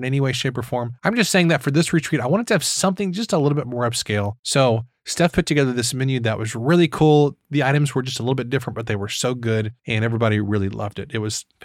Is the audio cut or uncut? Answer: cut